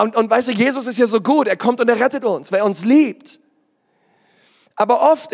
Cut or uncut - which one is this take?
uncut